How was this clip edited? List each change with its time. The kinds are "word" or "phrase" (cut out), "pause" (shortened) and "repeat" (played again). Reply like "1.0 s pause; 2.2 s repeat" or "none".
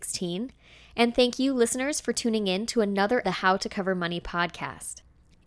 3.2 s phrase